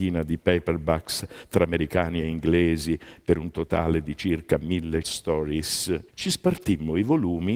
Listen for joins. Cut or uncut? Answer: cut